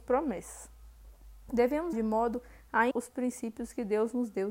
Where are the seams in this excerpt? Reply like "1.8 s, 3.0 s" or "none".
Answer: 1.9 s, 2.9 s